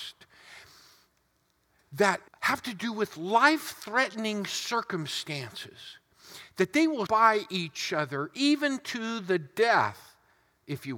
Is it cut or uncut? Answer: cut